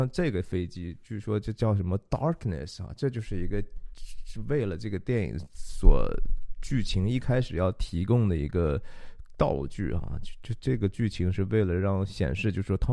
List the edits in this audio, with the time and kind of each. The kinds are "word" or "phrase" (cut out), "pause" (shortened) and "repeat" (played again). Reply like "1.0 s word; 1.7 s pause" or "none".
none